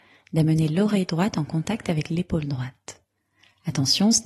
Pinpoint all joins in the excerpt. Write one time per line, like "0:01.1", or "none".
none